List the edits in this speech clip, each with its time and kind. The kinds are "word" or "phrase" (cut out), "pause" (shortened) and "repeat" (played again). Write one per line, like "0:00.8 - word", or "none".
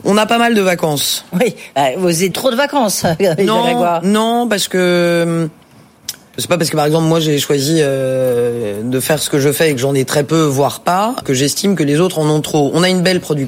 0:02.3 - word
0:06.4 - word
0:11.2 - word